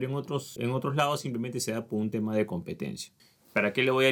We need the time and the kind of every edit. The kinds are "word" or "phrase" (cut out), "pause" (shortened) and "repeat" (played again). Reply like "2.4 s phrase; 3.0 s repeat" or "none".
none